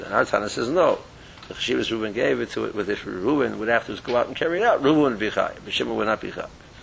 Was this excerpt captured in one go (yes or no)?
yes